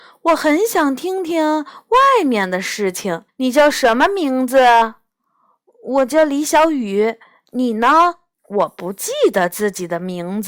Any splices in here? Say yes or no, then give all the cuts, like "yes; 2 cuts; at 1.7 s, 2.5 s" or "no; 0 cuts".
yes; 2 cuts; at 3.3 s, 8.3 s